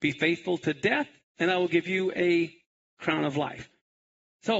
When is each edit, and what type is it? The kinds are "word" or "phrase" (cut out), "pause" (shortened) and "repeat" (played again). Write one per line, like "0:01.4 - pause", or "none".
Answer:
none